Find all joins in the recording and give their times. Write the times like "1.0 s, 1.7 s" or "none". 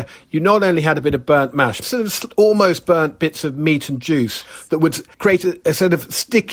1.8 s, 5.1 s